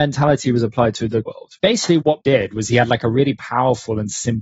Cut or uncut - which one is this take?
cut